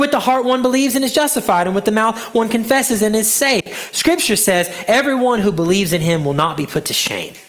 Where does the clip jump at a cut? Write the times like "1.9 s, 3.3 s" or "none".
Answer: none